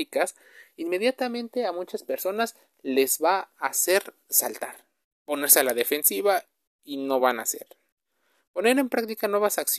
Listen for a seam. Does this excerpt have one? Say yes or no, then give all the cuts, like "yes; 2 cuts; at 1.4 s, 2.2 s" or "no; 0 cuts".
no; 0 cuts